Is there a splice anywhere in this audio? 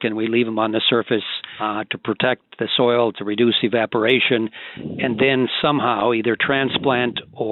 no; 0 cuts

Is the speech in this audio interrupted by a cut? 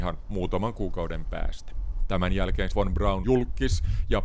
yes; 2 cuts; at 2.7 s, 3.2 s

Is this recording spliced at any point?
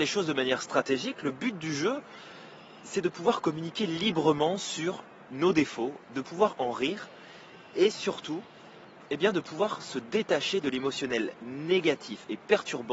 no; 0 cuts

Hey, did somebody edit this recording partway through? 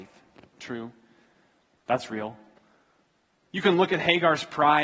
no; 0 cuts

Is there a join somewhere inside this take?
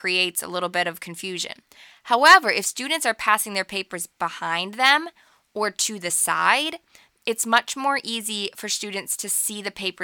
no; 0 cuts

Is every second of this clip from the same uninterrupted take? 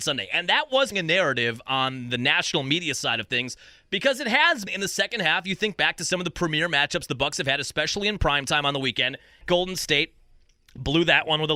no; 3 cuts; at 0.9 s, 4.7 s, 9.4 s

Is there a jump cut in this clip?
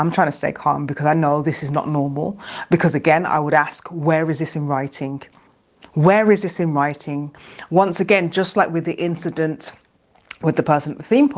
no; 0 cuts

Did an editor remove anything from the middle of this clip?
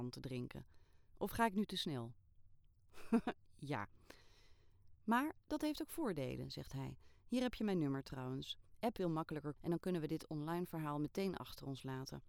yes; 2 cuts; at 9.0 s, 9.6 s

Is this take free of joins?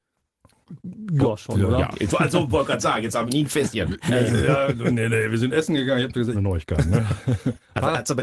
no; 3 cuts; at 1.9 s, 4.1 s, 6.3 s

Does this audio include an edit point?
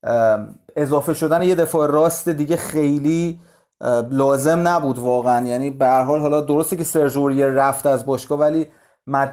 no; 0 cuts

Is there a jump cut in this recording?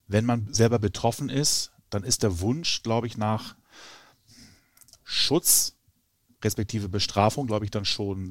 no; 0 cuts

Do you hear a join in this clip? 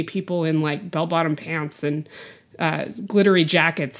no; 0 cuts

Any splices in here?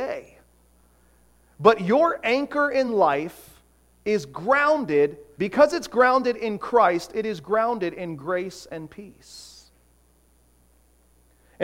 no; 0 cuts

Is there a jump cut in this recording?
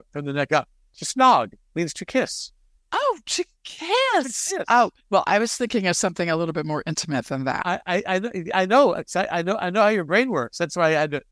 yes; 2 cuts; at 2.8 s, 5.0 s

